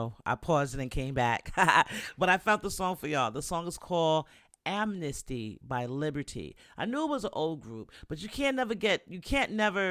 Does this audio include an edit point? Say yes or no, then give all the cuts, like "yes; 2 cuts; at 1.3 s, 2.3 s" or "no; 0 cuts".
no; 0 cuts